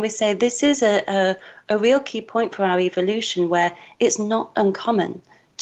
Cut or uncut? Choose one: uncut